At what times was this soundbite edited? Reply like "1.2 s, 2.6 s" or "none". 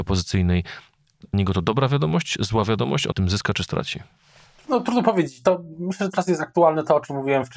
1.3 s, 3.1 s, 6.1 s